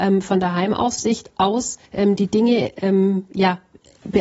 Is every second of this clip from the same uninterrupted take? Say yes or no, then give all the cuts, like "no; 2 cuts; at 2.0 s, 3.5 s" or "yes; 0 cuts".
no; 1 cut; at 1.9 s